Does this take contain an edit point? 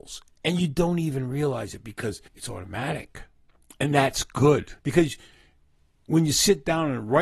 yes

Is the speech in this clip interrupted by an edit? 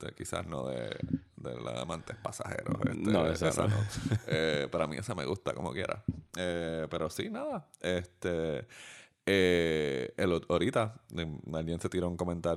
no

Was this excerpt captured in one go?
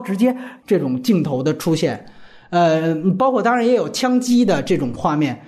yes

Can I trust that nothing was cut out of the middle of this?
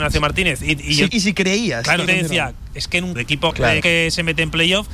no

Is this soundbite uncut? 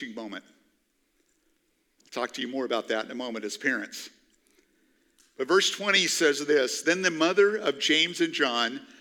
yes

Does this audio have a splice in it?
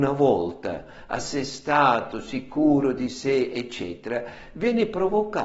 no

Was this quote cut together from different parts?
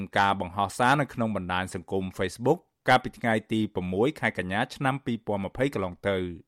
no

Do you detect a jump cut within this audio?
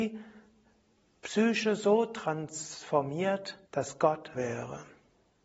yes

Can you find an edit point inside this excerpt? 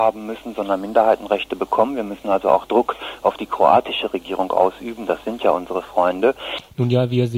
no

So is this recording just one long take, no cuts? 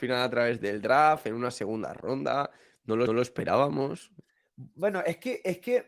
no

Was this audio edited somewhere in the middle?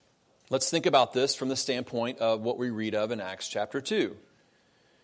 no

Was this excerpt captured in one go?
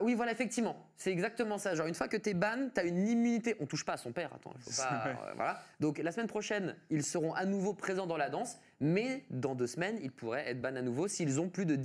yes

